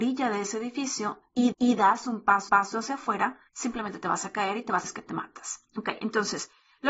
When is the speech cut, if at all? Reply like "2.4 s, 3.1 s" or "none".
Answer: 1.5 s, 2.5 s, 3.5 s, 4.8 s, 5.7 s